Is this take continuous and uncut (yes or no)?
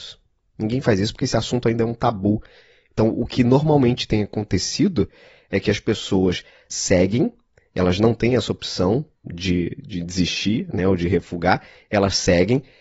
yes